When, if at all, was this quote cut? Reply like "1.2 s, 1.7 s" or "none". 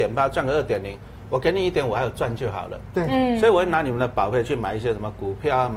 none